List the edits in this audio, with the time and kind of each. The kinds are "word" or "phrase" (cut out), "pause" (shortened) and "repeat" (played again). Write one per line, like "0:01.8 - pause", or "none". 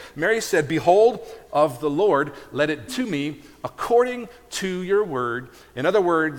0:01.5 - phrase
0:02.9 - word